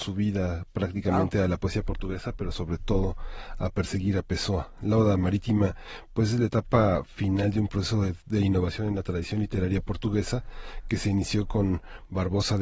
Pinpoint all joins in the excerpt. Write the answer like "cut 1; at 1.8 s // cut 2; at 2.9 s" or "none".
none